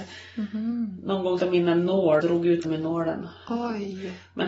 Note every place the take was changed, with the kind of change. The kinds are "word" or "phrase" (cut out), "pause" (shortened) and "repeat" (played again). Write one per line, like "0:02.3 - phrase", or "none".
0:01.4 - word
0:02.2 - word
0:02.6 - word

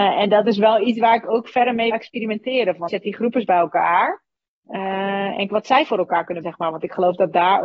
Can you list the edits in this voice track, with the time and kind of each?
0:01.9 - word
0:02.9 - word
0:05.5 - word
0:06.4 - word

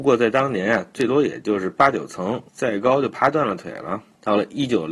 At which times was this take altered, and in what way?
0:02.5 - pause

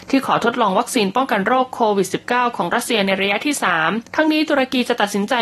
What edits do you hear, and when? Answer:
0:04.1 - pause

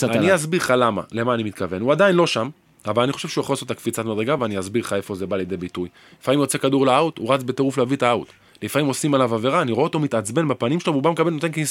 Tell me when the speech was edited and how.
none

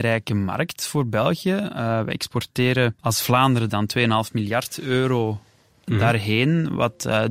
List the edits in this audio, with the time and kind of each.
0:03.0 - pause

